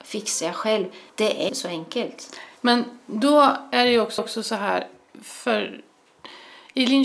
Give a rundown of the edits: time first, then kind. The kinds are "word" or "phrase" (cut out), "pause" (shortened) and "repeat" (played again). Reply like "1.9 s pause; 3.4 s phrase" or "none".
1.1 s pause; 1.5 s word; 2.6 s pause; 4.2 s repeat